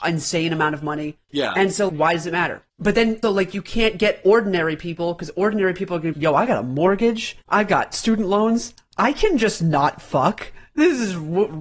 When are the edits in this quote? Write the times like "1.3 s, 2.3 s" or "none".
1.2 s, 1.9 s, 2.7 s, 3.2 s, 6.1 s, 7.4 s

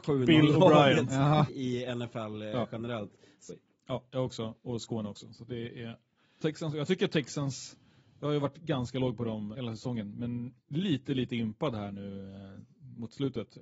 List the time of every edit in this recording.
1.5 s, 3.5 s, 6.4 s, 9.5 s, 10.6 s

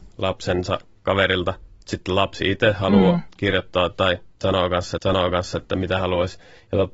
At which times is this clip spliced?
5.0 s, 6.0 s

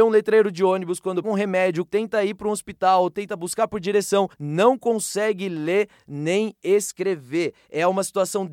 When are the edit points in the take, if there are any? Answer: 1.2 s, 1.9 s, 4.3 s

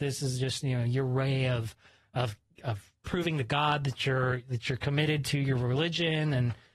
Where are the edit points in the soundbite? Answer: none

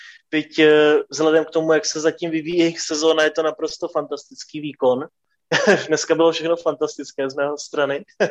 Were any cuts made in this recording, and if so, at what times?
none

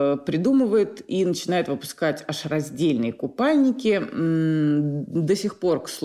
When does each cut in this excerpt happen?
none

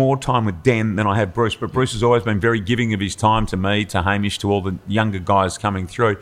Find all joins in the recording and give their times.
none

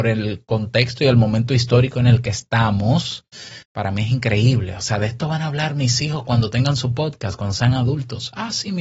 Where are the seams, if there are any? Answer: 3.6 s

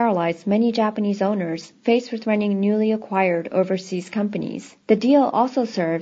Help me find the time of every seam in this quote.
4.8 s

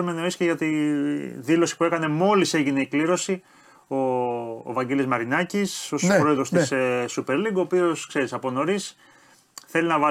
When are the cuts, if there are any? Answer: none

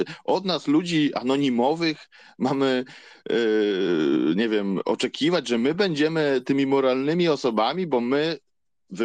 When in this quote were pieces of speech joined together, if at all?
none

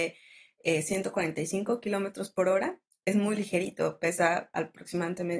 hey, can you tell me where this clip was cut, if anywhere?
3.0 s

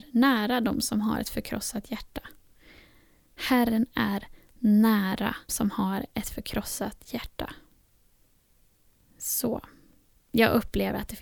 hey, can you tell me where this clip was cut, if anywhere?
5.5 s

